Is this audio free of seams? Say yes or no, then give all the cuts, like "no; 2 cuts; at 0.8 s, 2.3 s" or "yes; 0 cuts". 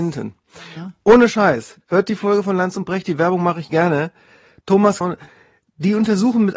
no; 1 cut; at 5.0 s